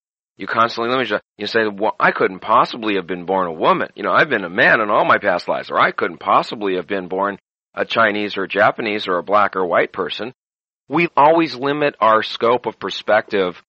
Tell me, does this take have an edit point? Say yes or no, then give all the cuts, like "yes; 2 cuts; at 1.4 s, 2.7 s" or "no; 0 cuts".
no; 0 cuts